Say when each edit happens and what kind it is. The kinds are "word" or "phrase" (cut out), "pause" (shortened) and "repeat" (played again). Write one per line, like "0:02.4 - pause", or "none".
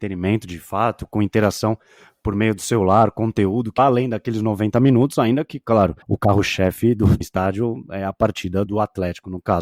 0:03.8 - word
0:06.0 - pause
0:07.2 - word
0:08.7 - word